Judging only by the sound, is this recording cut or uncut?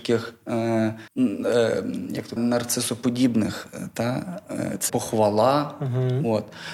cut